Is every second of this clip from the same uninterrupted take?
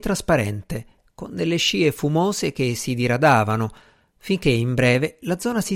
yes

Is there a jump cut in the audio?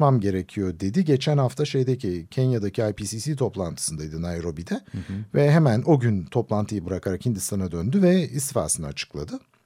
no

